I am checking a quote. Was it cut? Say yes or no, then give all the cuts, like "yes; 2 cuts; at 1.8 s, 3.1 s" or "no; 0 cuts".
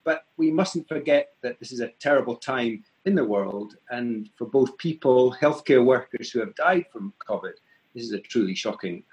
no; 0 cuts